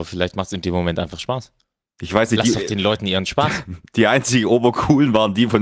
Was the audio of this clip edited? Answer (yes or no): no